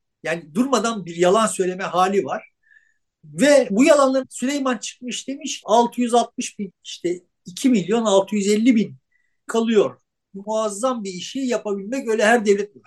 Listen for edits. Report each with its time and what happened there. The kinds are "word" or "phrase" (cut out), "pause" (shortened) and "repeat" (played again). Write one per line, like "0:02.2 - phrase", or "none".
0:03.7 - word
0:04.2 - word
0:05.6 - word
0:06.7 - word
0:09.5 - word
0:10.4 - word